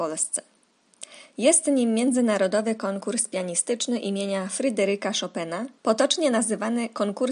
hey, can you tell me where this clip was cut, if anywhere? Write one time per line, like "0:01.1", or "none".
0:05.8